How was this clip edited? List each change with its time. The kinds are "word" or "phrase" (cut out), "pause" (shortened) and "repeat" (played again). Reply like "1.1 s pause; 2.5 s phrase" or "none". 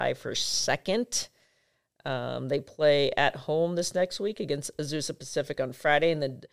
none